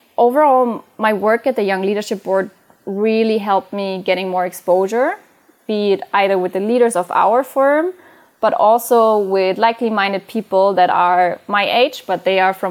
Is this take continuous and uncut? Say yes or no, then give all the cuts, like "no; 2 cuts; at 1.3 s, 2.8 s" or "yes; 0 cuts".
yes; 0 cuts